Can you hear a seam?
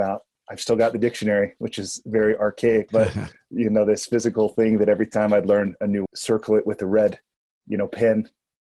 yes; 2 cuts; at 2.9 s, 6.1 s

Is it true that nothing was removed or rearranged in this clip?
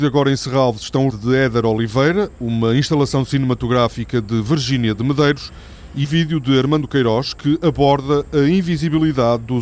no; 2 cuts; at 1.1 s, 6.0 s

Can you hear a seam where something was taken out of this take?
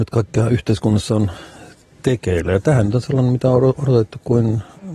no; 0 cuts

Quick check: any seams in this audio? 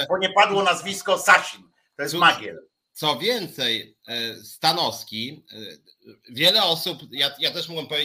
no; 0 cuts

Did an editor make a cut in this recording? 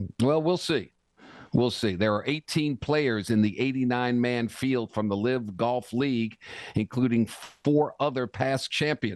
no; 0 cuts

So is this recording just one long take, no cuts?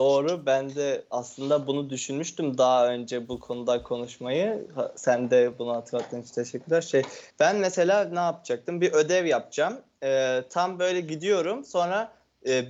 no; 1 cut; at 7.3 s

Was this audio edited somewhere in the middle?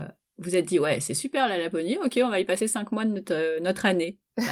no; 0 cuts

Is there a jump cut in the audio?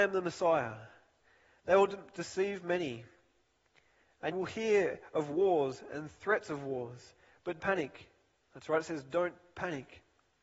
yes; 2 cuts; at 4.3 s, 7.6 s

